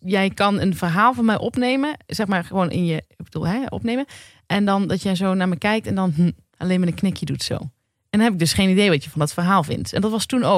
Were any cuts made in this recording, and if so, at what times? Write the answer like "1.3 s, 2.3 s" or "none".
none